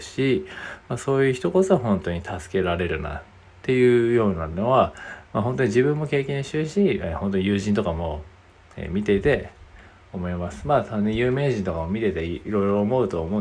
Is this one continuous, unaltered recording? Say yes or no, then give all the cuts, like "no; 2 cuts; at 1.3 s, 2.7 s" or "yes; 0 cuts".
yes; 0 cuts